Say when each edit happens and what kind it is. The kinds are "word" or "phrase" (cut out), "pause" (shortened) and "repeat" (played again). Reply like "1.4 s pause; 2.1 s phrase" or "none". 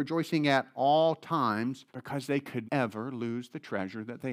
1.9 s pause; 2.6 s word